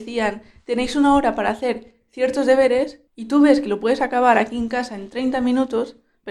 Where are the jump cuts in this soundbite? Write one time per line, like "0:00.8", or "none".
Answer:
0:03.1